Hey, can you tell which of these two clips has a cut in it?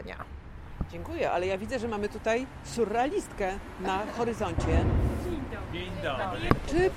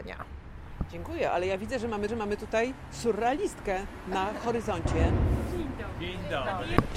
second; 1 cut; at 2.1 s

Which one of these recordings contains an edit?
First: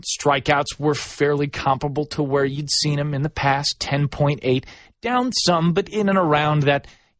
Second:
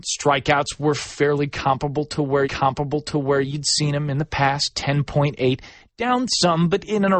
second; 1 cut; at 2.4 s

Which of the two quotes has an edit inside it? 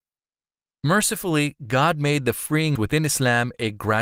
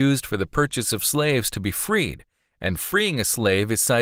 first; 1 cut; at 2.8 s

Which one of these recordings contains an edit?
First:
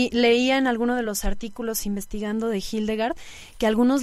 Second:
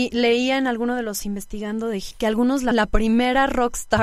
second; 3 cuts; at 1.2 s, 2.1 s, 2.7 s

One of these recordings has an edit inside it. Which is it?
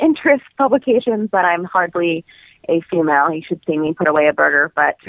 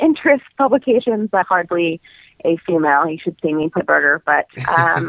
second; 2 cuts; at 1.4 s, 3.8 s

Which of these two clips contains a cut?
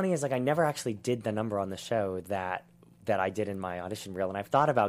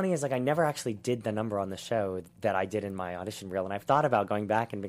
second; 1 cut; at 2.2 s

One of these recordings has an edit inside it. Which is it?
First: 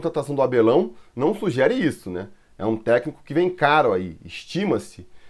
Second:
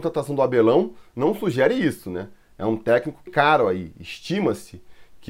second; 1 cut; at 3.3 s

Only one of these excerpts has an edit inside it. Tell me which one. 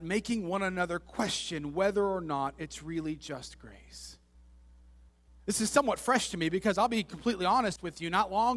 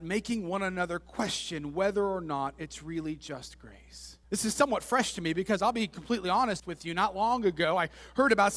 second; 1 cut; at 4.2 s

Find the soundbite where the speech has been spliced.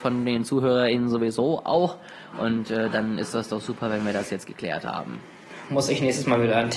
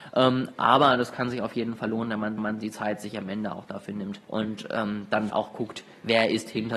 second; 3 cuts; at 2.4 s, 4.2 s, 5.3 s

